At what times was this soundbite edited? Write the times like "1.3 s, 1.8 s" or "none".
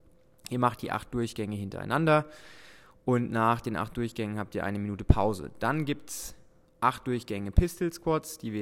none